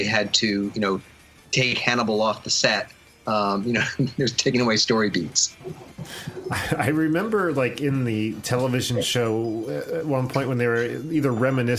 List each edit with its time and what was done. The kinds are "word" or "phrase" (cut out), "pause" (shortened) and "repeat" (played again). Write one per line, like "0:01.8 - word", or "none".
none